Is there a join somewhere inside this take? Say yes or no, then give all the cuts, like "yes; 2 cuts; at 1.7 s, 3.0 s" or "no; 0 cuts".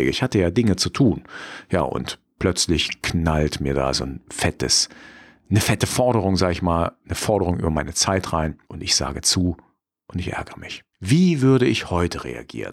yes; 2 cuts; at 8.6 s, 10.9 s